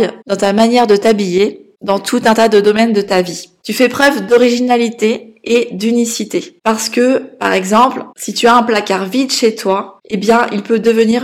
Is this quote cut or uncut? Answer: uncut